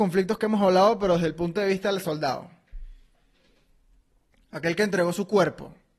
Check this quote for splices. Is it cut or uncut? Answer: uncut